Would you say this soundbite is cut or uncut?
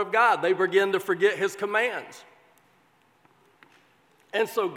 uncut